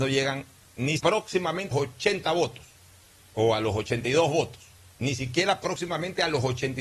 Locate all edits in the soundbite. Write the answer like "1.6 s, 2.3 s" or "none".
1.0 s, 1.7 s, 3.3 s